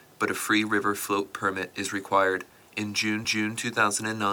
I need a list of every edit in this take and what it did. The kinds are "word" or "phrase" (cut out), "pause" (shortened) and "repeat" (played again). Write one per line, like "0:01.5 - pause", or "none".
0:02.5 - pause
0:03.2 - repeat